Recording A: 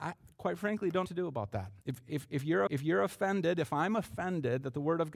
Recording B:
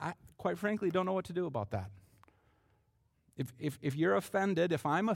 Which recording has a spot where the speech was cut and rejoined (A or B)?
A